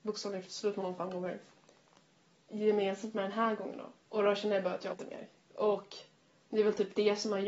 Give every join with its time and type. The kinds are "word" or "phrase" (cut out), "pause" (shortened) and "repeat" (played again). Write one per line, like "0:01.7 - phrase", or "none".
0:03.9 - pause
0:04.9 - word